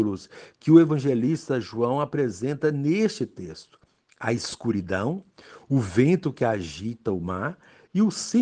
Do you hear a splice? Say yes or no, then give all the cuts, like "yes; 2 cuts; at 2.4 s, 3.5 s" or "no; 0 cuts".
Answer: no; 0 cuts